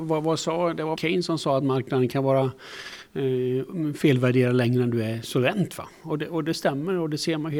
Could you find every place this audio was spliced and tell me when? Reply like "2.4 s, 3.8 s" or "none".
1.0 s